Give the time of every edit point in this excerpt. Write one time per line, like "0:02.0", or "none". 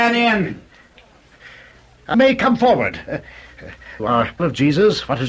0:02.1
0:04.0
0:04.4